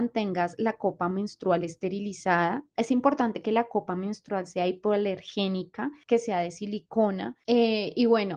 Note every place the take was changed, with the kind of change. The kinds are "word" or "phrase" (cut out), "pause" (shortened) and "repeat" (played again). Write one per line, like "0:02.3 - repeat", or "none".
none